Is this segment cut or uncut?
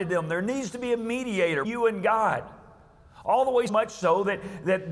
cut